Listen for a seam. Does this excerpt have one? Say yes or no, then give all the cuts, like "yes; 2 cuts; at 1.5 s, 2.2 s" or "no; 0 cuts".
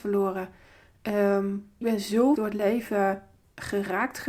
yes; 2 cuts; at 1.8 s, 2.4 s